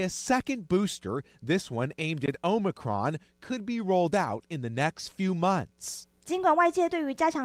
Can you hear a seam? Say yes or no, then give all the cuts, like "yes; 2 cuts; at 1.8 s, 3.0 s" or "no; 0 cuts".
no; 0 cuts